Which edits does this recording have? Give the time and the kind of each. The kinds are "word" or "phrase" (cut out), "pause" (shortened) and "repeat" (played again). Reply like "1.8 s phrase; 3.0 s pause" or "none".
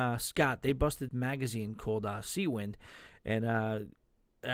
1.1 s phrase